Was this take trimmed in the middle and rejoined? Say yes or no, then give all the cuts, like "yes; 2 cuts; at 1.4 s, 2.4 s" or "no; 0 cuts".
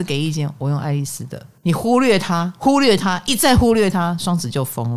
yes; 1 cut; at 1.6 s